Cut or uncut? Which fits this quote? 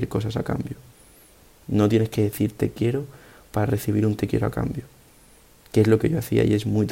uncut